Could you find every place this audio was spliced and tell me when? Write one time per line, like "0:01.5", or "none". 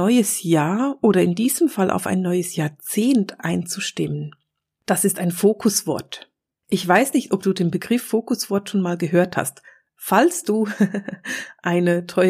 none